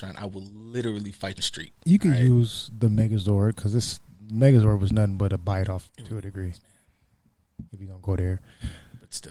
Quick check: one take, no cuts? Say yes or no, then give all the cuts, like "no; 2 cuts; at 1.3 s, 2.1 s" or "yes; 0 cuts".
no; 4 cuts; at 1.4 s, 1.8 s, 5.9 s, 7.7 s